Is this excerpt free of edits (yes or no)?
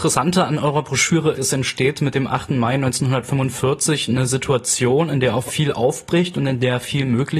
no